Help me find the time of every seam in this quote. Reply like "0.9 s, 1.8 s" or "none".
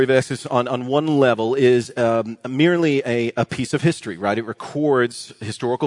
none